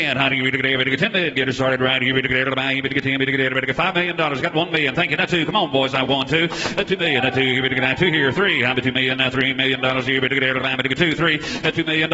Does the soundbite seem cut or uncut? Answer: uncut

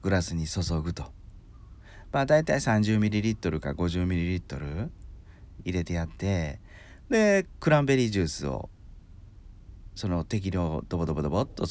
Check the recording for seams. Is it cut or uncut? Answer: uncut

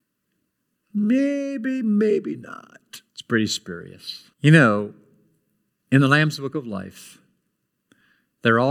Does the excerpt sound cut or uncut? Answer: cut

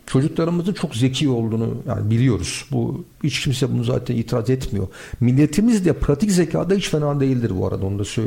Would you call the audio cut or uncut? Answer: cut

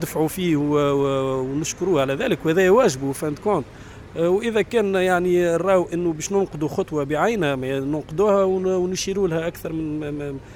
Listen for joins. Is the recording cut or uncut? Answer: uncut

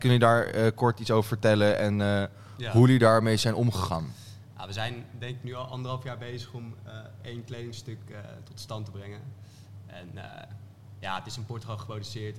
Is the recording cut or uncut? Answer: uncut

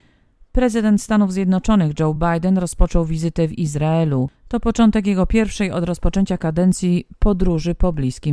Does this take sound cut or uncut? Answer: uncut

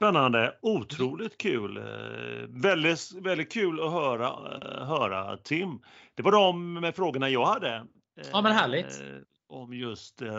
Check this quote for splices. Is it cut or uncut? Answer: uncut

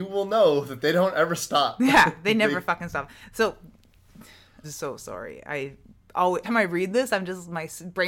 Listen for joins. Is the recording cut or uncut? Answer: cut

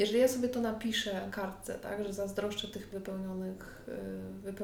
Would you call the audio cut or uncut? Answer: cut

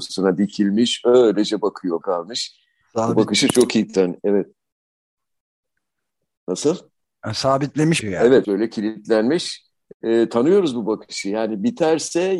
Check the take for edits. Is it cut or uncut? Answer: cut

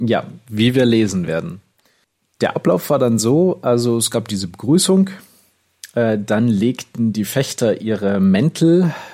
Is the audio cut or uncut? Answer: uncut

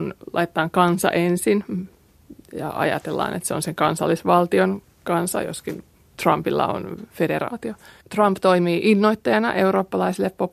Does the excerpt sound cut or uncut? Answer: uncut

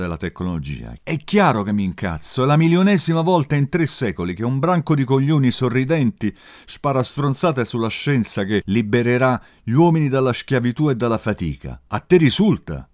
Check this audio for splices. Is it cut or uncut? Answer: uncut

